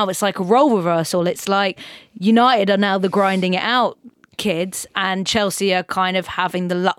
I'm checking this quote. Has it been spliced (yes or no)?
no